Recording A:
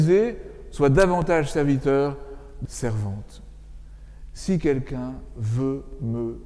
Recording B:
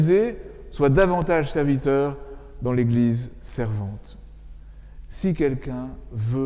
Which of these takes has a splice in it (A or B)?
A